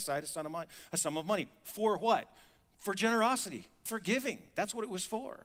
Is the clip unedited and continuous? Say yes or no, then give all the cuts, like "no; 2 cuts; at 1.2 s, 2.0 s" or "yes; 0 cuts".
no; 1 cut; at 3.9 s